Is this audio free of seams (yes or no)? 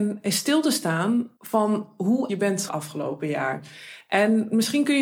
no